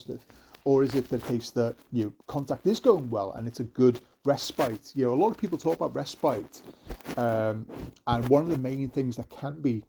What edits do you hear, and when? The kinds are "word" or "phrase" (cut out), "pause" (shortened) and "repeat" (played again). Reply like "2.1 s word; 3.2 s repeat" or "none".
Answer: 2.2 s pause